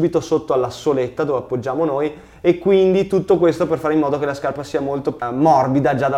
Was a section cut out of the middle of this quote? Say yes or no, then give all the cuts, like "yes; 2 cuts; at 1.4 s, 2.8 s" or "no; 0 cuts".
no; 0 cuts